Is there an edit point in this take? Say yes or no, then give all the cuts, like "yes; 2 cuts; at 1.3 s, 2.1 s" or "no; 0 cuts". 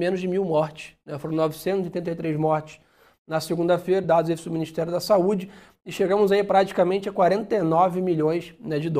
no; 0 cuts